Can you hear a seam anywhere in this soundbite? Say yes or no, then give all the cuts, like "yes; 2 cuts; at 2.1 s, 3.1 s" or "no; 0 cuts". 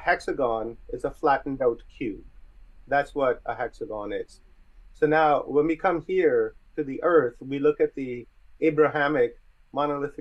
no; 0 cuts